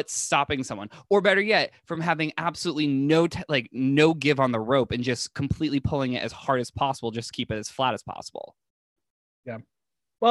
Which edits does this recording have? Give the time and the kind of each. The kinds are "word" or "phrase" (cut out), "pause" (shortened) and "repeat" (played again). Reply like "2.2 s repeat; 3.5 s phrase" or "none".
none

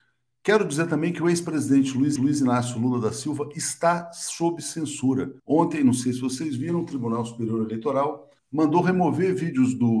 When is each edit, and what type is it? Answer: 2.2 s repeat; 5.4 s pause; 8.4 s pause

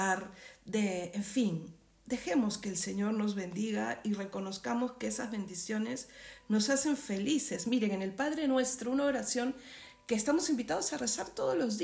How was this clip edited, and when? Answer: none

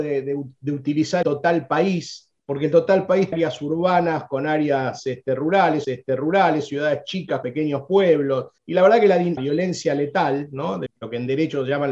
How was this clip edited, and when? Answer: 1.2 s word; 2.4 s pause; 3.3 s phrase; 5.8 s repeat; 7.4 s word; 8.6 s pause; 9.4 s phrase; 10.9 s word

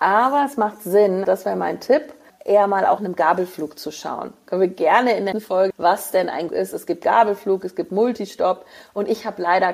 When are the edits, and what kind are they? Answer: 1.2 s word; 2.3 s word; 3.0 s word; 5.3 s word; 5.7 s word; 6.5 s word

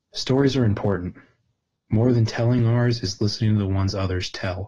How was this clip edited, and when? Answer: none

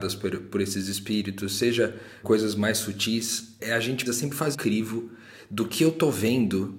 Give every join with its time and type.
2.2 s word; 3.6 s word; 4.1 s word; 4.5 s word

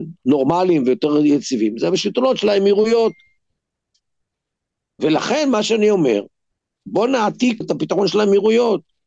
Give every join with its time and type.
7.6 s word

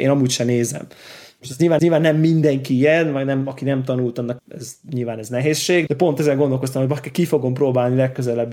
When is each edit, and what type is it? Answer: 1.8 s repeat; 4.4 s word; 5.9 s word

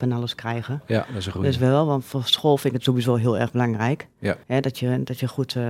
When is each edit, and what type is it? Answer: 4.4 s pause

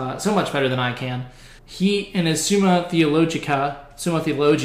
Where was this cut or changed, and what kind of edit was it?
1.6 s pause

